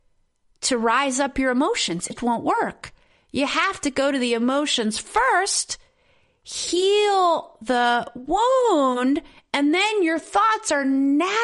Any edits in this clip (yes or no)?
yes